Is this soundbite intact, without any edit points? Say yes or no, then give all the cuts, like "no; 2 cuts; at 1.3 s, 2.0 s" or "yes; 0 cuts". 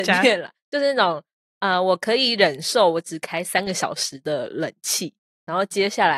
yes; 0 cuts